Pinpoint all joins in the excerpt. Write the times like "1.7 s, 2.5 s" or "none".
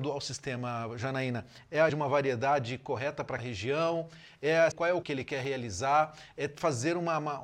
1.9 s, 3.4 s, 4.7 s, 5.0 s